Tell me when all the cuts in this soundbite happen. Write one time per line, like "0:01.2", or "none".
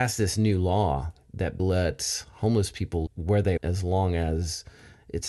0:01.6
0:03.1
0:03.6